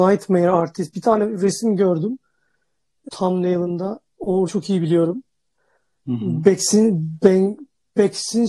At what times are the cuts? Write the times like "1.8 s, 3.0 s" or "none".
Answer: 3.1 s, 4.5 s